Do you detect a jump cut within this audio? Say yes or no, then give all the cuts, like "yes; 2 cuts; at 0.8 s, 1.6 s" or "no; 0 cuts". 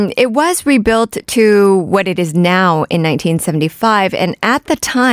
no; 0 cuts